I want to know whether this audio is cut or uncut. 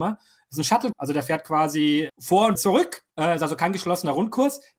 cut